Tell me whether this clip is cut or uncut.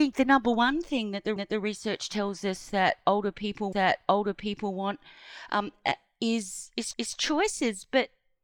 cut